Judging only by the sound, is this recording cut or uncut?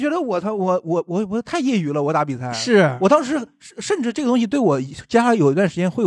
uncut